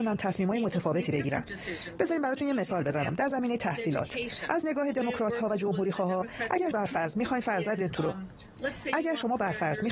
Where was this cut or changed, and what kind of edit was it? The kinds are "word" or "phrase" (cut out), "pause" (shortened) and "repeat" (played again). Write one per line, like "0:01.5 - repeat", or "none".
0:06.7 - word